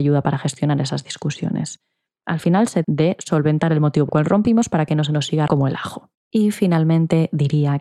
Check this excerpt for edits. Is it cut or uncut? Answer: cut